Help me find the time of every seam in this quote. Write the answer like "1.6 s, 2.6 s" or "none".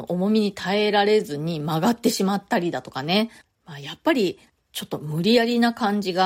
none